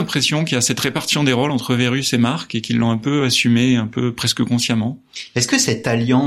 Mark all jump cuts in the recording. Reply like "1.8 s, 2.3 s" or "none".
none